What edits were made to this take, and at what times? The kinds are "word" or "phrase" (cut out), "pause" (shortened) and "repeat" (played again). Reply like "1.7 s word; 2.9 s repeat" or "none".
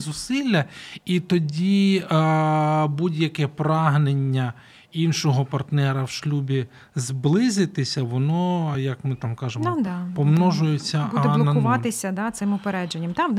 none